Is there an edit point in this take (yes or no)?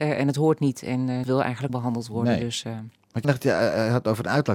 yes